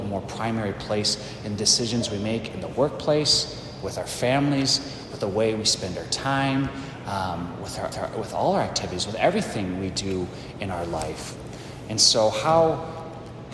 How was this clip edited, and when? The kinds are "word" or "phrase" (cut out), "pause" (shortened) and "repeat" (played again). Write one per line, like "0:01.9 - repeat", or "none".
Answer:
0:07.9 - repeat